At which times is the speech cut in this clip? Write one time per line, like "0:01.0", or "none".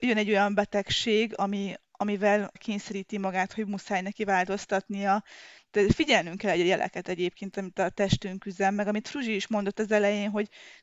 0:02.6